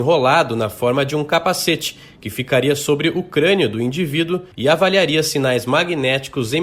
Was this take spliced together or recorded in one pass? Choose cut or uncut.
cut